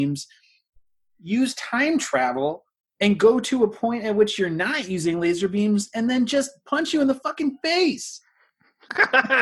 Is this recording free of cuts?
yes; 0 cuts

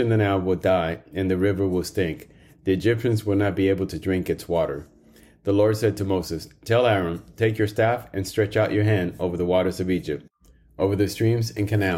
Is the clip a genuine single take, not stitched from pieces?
yes; 0 cuts

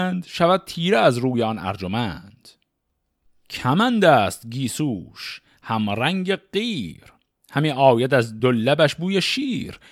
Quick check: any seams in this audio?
no; 0 cuts

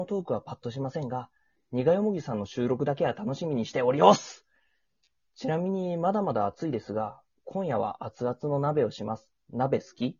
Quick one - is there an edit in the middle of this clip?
no; 0 cuts

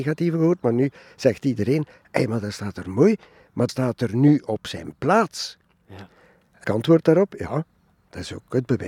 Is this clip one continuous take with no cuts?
no; 2 cuts; at 3.7 s, 6.6 s

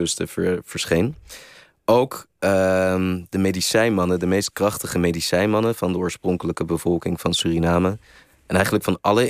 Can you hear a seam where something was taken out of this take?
no; 0 cuts

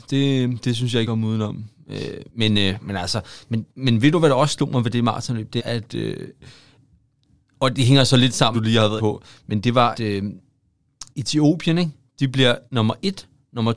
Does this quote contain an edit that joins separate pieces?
yes; 9 cuts; at 1.0 s, 2.3 s, 3.7 s, 5.6 s, 8.5 s, 9.0 s, 9.9 s, 11.1 s, 12.7 s

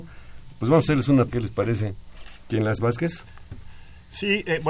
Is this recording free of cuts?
no; 2 cuts; at 1.3 s, 2.8 s

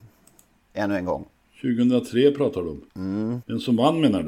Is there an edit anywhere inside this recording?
yes; 1 cut; at 2.9 s

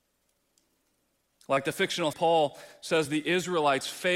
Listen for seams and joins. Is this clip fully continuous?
no; 1 cut; at 2.1 s

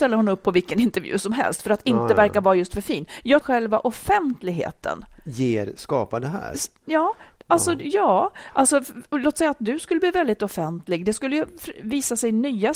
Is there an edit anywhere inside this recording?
yes; 1 cut; at 3.4 s

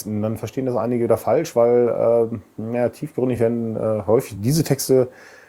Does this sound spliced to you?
no; 0 cuts

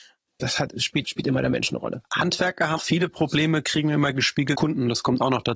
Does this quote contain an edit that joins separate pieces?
yes; 3 cuts; at 1.0 s, 2.8 s, 4.5 s

